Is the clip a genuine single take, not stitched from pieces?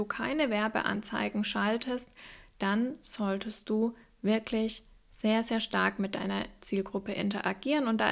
yes; 0 cuts

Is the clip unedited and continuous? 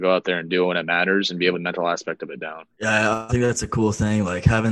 no; 3 cuts; at 1.5 s, 2.7 s, 3.3 s

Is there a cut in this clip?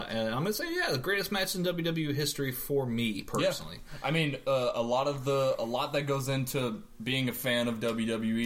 no; 0 cuts

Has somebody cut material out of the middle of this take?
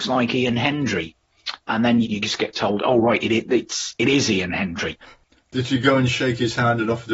yes; 2 cuts; at 1.7 s, 2.0 s

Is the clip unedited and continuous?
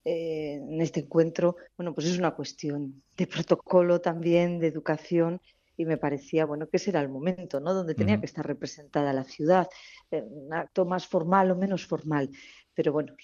yes; 0 cuts

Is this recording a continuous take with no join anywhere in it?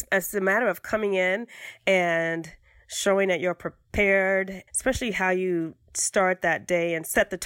no; 1 cut; at 4.7 s

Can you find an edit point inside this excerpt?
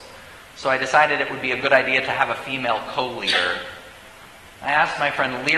no; 0 cuts

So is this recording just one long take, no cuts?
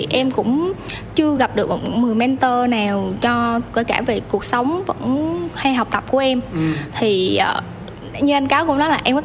yes; 0 cuts

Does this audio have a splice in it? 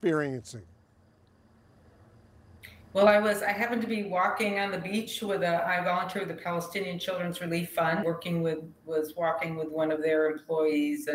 yes; 1 cut; at 8.0 s

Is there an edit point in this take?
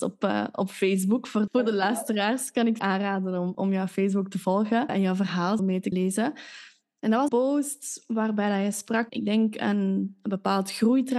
yes; 8 cuts; at 1.5 s, 2.8 s, 3.5 s, 4.9 s, 5.6 s, 5.9 s, 7.3 s, 9.1 s

